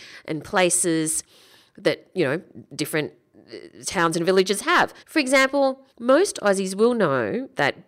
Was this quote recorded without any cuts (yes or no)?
no